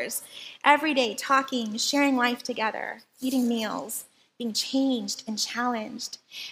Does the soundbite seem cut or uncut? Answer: uncut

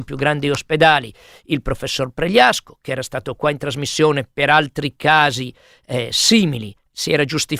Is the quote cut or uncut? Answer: uncut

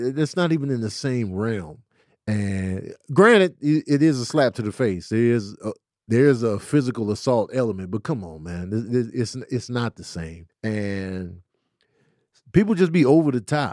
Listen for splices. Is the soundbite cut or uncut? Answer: cut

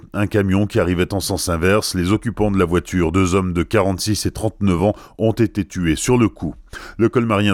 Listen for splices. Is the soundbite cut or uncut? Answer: uncut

